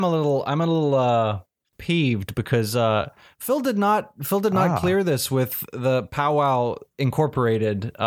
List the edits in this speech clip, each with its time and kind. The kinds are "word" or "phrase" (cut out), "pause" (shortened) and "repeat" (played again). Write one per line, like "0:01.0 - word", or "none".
none